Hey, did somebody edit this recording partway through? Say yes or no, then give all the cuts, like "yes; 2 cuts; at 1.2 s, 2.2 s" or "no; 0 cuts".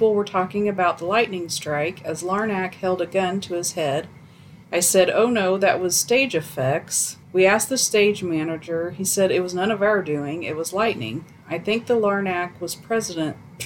yes; 2 cuts; at 4.6 s, 7.2 s